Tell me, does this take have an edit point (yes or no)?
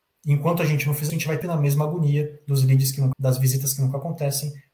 yes